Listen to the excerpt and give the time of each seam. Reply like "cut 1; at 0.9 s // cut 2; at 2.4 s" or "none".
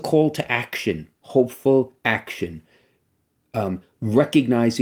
cut 1; at 1.2 s